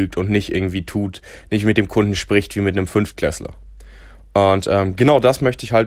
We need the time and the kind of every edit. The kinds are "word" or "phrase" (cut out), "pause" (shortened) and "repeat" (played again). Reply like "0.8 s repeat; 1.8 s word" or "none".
none